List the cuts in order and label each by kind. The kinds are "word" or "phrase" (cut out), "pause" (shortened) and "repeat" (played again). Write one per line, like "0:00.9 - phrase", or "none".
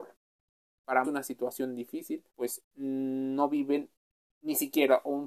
0:01.0 - phrase
0:02.3 - pause